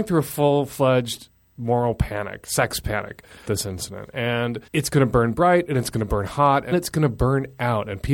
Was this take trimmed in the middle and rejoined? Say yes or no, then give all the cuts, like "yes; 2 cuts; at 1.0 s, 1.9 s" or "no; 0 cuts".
yes; 3 cuts; at 3.5 s, 4.7 s, 6.7 s